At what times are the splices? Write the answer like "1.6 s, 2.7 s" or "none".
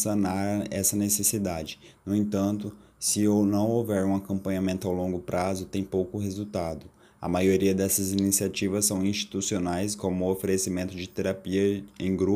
none